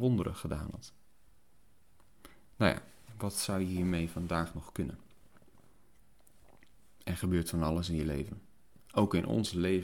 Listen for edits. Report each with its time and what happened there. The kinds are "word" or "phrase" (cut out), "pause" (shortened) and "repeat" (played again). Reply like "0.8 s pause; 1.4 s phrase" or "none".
none